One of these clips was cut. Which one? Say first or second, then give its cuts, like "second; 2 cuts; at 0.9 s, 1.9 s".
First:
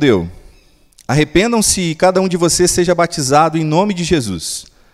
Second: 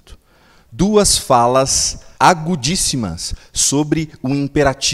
second; 1 cut; at 2.1 s